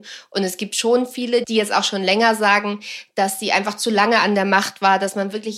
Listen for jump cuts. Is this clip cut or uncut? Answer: uncut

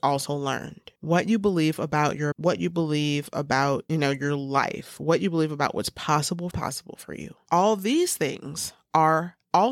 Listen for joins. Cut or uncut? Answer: cut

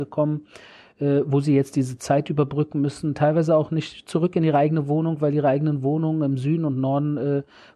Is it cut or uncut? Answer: uncut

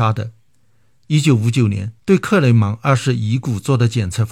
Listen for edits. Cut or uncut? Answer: cut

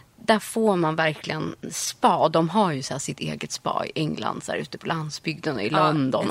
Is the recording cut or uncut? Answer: uncut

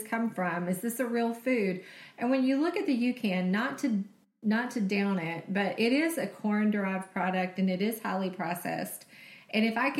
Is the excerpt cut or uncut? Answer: uncut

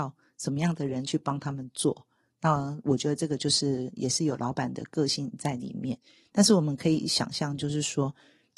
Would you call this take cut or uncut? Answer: uncut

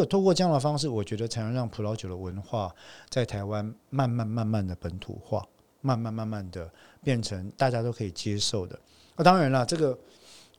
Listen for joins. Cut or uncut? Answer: cut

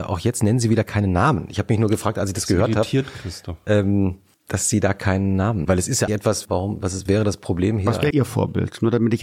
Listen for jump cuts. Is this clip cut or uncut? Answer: cut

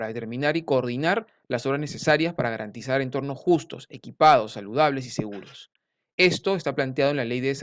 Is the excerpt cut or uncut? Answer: uncut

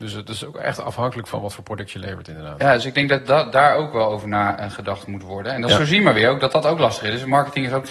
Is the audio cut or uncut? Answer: uncut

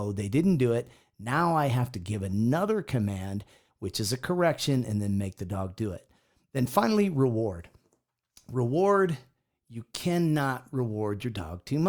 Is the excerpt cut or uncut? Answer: uncut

